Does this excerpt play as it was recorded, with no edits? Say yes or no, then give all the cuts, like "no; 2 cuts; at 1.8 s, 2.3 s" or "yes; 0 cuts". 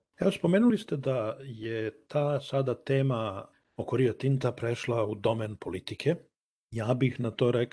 yes; 0 cuts